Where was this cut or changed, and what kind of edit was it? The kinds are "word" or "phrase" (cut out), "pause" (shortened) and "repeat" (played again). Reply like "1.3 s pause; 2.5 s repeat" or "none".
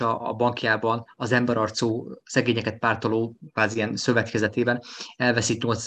none